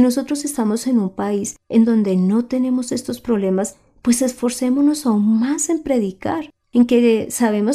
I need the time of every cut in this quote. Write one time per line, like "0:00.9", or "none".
none